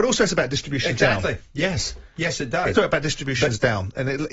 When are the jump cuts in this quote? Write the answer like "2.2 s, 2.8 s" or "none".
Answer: 2.8 s